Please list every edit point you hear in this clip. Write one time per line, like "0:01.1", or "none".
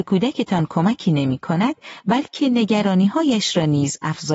none